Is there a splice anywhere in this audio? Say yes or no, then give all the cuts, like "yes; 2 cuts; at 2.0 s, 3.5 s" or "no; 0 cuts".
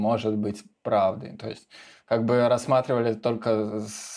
yes; 1 cut; at 2.0 s